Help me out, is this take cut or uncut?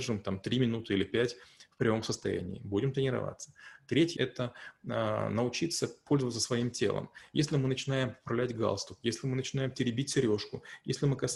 cut